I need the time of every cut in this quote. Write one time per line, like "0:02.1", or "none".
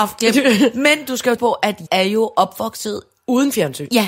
0:01.4
0:01.9